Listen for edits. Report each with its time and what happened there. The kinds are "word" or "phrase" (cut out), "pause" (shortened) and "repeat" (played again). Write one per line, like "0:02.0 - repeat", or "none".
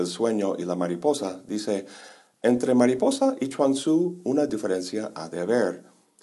none